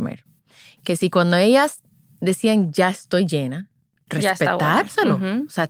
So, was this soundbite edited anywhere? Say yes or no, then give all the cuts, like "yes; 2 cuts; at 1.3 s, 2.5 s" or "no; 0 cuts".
no; 0 cuts